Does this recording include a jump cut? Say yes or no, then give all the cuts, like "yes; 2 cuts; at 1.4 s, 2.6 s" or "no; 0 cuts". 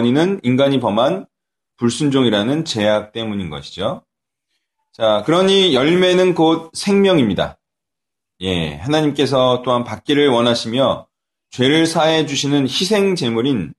no; 0 cuts